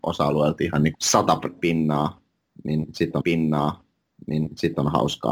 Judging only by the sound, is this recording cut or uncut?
cut